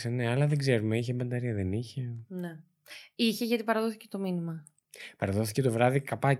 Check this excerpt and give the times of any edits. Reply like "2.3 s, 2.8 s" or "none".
none